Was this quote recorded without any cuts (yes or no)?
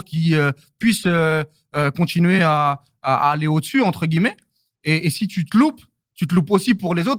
yes